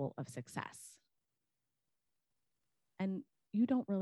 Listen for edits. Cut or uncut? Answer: uncut